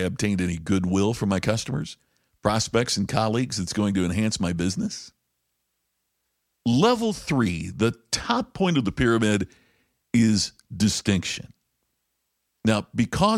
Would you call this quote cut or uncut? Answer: uncut